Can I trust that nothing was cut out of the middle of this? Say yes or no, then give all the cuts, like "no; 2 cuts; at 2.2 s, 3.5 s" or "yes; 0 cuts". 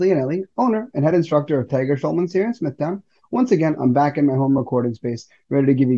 yes; 0 cuts